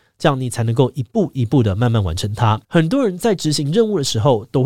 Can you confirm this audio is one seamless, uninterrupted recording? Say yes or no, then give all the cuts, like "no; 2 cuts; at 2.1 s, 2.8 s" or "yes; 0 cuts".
no; 1 cut; at 2.6 s